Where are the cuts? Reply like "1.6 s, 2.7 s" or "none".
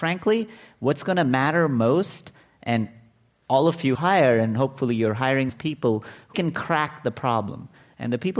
3.9 s, 5.5 s, 6.3 s